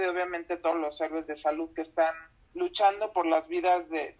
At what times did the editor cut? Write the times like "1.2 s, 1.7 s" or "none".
1.3 s